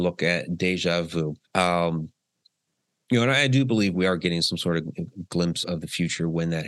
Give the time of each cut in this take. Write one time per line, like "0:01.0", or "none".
0:01.5
0:05.6